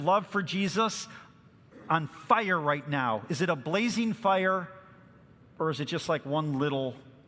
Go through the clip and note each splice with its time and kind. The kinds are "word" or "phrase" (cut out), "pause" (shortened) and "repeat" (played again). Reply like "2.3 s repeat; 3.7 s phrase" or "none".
none

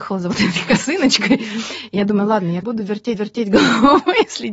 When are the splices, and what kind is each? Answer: 2.6 s phrase; 3.1 s repeat

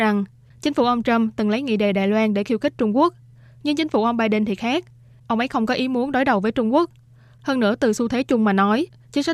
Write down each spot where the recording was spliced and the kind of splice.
none

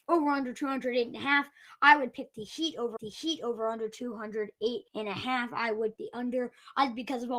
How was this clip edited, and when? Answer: 3.0 s repeat; 4.9 s pause; 6.0 s word

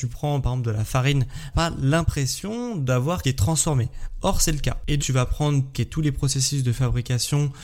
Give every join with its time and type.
1.5 s phrase; 3.2 s phrase; 5.0 s word; 5.7 s phrase

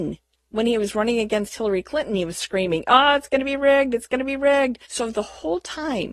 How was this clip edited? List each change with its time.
4.9 s pause

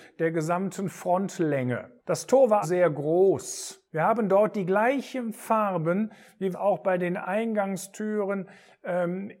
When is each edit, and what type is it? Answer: 2.0 s pause; 2.6 s word; 3.9 s pause; 6.5 s phrase

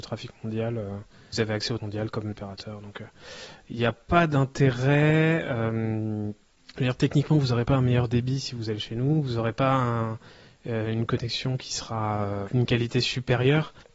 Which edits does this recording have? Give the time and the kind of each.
1.3 s word; 1.8 s word; 2.3 s phrase

